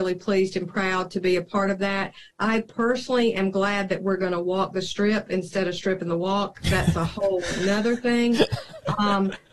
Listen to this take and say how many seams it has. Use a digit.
0